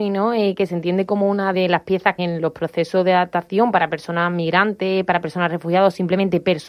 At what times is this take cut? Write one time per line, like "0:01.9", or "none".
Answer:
0:01.5
0:02.2